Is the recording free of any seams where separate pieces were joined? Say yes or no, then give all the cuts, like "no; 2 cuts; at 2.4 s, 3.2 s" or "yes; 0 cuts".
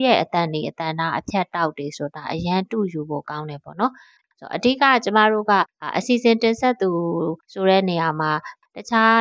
yes; 0 cuts